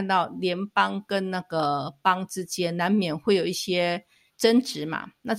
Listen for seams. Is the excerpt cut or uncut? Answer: cut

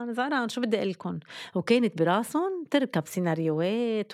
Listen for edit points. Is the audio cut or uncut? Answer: uncut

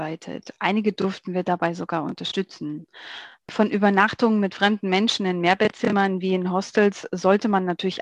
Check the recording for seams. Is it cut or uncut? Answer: uncut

